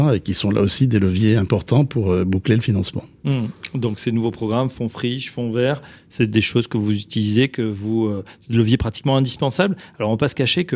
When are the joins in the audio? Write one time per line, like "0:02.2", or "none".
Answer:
none